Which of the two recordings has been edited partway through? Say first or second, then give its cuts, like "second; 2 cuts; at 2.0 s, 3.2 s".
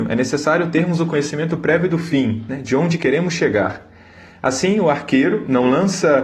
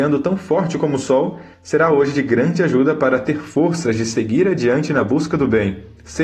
second; 1 cut; at 1.5 s